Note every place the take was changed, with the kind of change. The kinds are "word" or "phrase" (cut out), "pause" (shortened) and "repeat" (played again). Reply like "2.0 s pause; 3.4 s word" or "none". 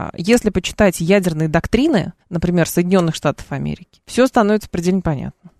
2.2 s pause; 4.0 s pause